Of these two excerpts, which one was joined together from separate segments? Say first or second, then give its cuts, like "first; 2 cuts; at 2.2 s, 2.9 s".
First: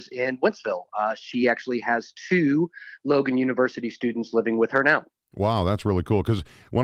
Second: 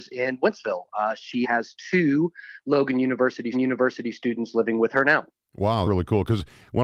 second; 3 cuts; at 1.4 s, 3.5 s, 5.8 s